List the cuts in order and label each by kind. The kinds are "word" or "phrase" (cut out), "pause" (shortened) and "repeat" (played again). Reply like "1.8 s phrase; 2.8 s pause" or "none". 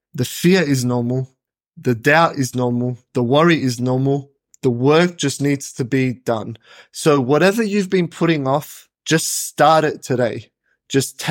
1.5 s pause; 8.9 s pause